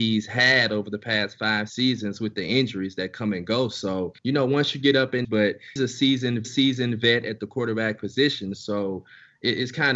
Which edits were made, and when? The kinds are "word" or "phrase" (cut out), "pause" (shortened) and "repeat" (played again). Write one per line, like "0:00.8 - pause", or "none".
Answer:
0:01.7 - word
0:04.2 - pause
0:05.2 - word
0:05.8 - word
0:06.4 - repeat